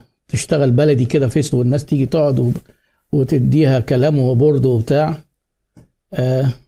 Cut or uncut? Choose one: cut